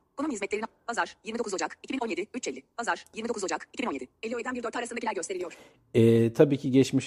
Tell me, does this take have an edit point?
no; 0 cuts

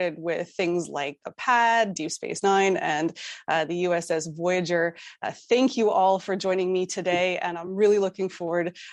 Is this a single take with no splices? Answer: yes; 0 cuts

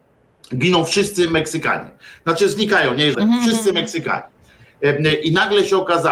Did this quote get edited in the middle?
yes; 1 cut; at 3.1 s

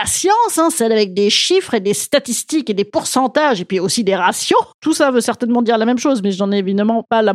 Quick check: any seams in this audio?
no; 0 cuts

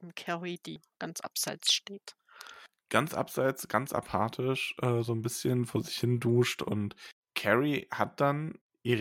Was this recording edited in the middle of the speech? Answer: no; 0 cuts

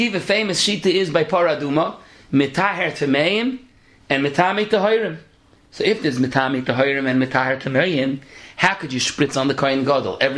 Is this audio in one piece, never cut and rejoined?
yes; 0 cuts

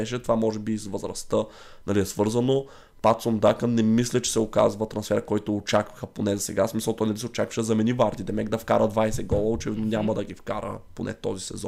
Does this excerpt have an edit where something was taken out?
no; 0 cuts

